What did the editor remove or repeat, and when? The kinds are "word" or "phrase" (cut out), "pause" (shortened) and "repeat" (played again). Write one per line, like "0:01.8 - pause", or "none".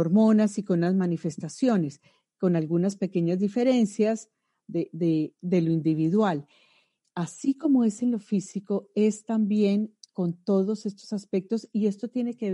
none